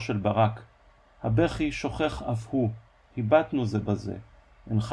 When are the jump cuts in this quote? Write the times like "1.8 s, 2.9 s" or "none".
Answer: 3.0 s